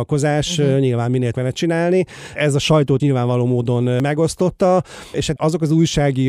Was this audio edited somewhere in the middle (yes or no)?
yes